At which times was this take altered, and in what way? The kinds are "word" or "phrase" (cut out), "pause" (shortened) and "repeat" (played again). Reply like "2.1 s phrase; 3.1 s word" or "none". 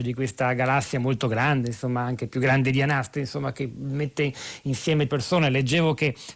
5.1 s word